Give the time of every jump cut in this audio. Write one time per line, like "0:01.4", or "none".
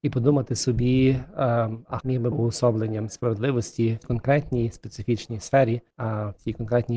0:02.0
0:02.3
0:04.0
0:05.9